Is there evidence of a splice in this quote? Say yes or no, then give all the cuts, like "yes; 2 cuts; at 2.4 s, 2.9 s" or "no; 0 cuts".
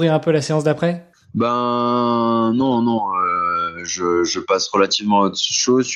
no; 0 cuts